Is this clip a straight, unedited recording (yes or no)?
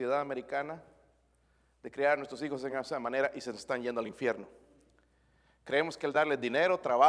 yes